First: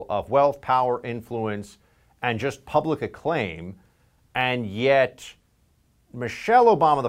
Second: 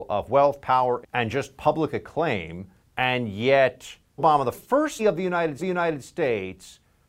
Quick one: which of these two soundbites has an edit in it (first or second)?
second